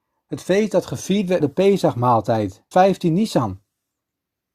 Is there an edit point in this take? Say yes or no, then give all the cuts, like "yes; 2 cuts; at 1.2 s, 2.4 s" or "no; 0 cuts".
yes; 2 cuts; at 1.4 s, 2.7 s